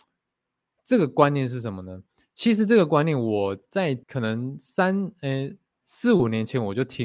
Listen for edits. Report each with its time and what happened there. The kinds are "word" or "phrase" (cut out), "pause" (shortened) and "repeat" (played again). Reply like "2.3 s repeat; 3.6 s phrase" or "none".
4.0 s pause